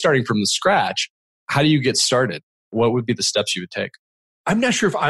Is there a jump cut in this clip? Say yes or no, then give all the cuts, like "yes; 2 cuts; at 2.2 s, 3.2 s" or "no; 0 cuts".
no; 0 cuts